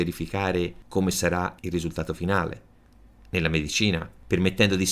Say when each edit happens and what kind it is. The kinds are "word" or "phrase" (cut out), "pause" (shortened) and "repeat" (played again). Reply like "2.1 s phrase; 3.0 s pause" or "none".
none